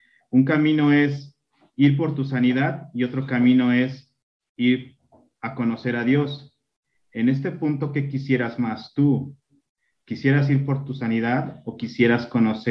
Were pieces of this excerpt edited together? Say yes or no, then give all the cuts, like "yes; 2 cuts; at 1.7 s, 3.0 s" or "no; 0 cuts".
no; 0 cuts